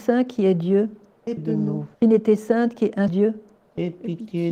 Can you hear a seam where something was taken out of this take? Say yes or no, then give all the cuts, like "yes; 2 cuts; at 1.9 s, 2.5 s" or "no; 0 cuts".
yes; 3 cuts; at 1.4 s, 1.9 s, 3.1 s